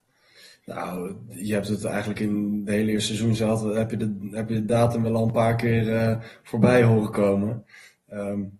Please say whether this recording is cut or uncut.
uncut